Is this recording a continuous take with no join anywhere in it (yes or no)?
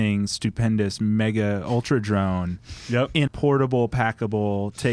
no